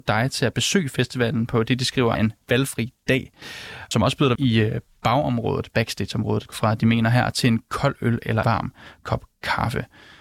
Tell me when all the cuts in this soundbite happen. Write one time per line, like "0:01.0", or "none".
0:02.2
0:03.9
0:04.4
0:06.5
0:08.4

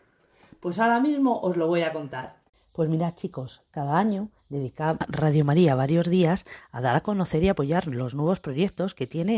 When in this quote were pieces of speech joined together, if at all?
0:02.4
0:04.4

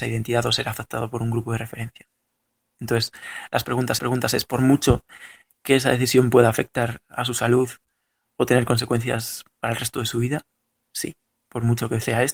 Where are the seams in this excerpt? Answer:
0:04.0

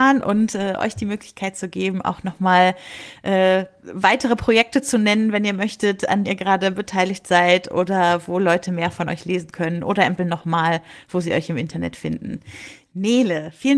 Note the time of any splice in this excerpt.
0:06.2
0:10.2

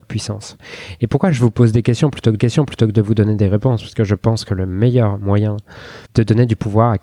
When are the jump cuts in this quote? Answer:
0:02.4
0:06.0

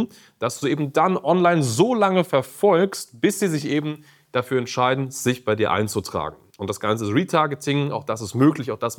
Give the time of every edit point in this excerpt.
none

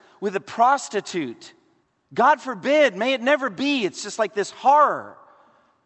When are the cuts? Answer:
0:01.8

